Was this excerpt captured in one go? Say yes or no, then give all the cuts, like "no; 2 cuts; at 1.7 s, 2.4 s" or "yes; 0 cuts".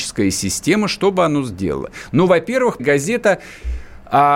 no; 1 cut; at 2.8 s